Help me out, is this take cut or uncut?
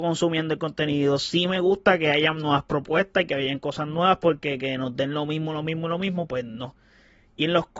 uncut